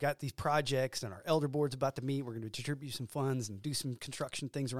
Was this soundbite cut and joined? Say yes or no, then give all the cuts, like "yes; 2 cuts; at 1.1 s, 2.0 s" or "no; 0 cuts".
no; 0 cuts